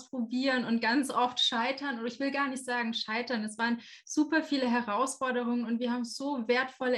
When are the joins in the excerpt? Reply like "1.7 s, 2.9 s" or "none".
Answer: none

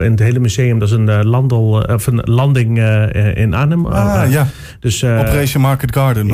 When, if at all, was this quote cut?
none

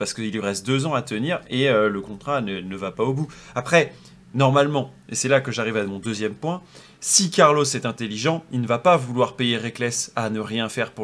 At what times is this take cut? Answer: none

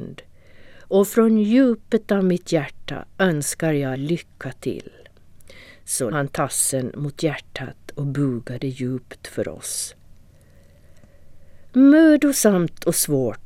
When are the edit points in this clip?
3.9 s, 6.1 s

